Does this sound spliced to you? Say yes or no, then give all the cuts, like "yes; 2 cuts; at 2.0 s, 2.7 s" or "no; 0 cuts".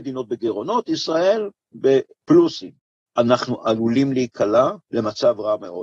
yes; 2 cuts; at 3.1 s, 4.8 s